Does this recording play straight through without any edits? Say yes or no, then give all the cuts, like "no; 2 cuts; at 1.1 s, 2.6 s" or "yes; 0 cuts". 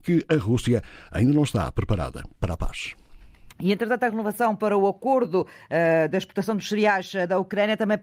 yes; 0 cuts